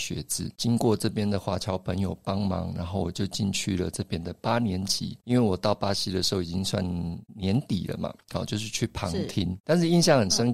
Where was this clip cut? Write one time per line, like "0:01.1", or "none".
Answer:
0:08.2

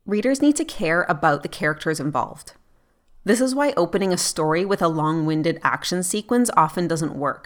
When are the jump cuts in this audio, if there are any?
none

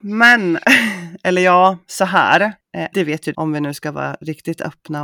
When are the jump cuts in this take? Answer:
0:02.9
0:03.3

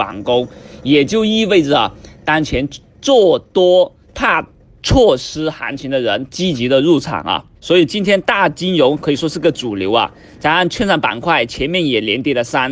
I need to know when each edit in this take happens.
0:04.0
0:07.5

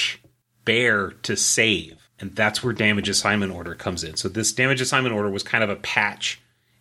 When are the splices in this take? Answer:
0:02.1

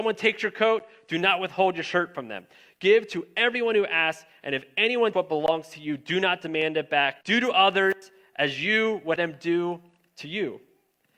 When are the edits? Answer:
0:05.1
0:07.2
0:09.2

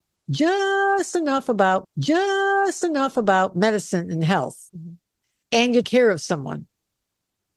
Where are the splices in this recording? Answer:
0:01.8
0:04.7
0:05.8

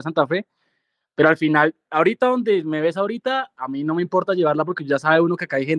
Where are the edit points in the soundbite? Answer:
none

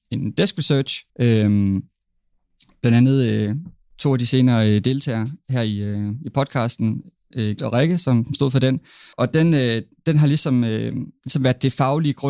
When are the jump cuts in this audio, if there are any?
0:01.1
0:07.6
0:09.1

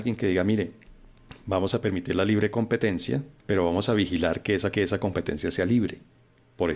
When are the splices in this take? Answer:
0:03.4
0:04.7

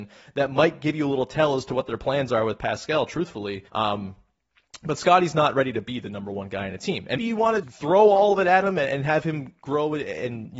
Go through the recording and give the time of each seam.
0:03.7
0:07.2
0:07.6

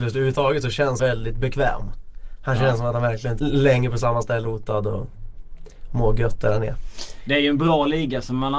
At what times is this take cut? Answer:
0:01.0
0:03.4
0:04.4

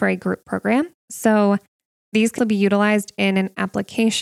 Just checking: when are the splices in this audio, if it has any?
0:01.0
0:02.4

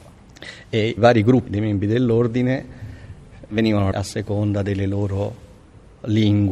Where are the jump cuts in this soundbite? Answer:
0:01.0
0:01.5
0:03.5
0:03.9

